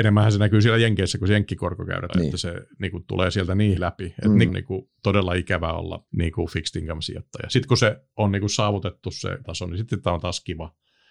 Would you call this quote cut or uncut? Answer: cut